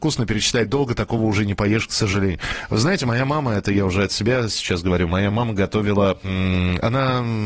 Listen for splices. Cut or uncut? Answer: uncut